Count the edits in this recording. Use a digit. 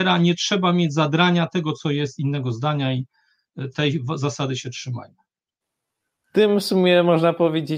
0